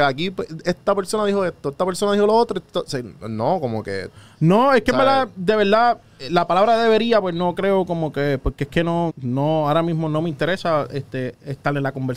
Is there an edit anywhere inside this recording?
yes; 1 cut; at 9.1 s

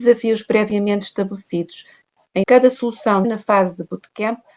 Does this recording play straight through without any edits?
no; 2 cuts; at 2.4 s, 3.2 s

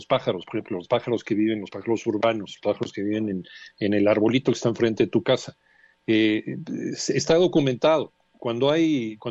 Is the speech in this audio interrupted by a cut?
no; 0 cuts

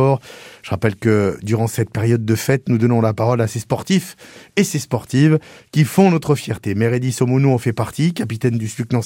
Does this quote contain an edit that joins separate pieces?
no; 0 cuts

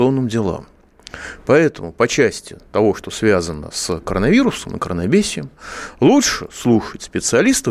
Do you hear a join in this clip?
no; 0 cuts

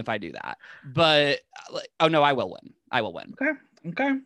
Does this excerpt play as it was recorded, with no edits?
yes; 0 cuts

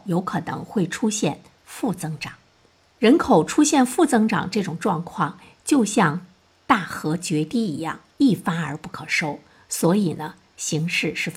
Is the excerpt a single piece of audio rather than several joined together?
yes; 0 cuts

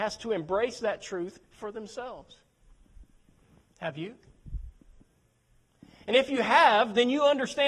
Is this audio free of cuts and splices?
no; 1 cut; at 1.4 s

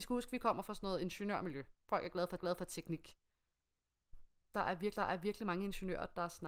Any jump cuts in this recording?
yes; 2 cuts; at 2.4 s, 5.0 s

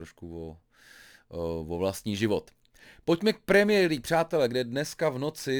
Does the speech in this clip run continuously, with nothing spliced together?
yes; 0 cuts

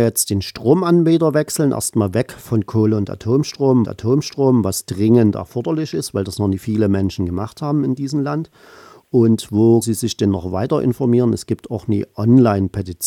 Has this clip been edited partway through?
yes; 2 cuts; at 3.8 s, 9.8 s

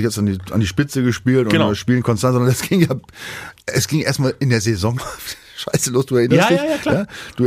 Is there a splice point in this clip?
yes; 2 cuts; at 3.6 s, 5.0 s

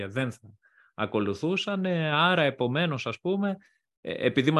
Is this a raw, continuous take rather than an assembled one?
yes; 0 cuts

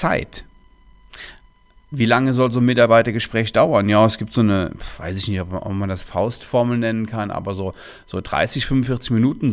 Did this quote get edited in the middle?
no; 0 cuts

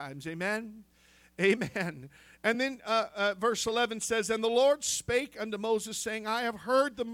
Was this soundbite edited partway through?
no; 0 cuts

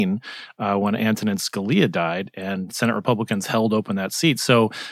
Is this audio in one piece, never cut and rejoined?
yes; 0 cuts

